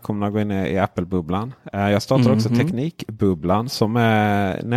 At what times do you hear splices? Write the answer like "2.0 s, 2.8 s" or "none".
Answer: none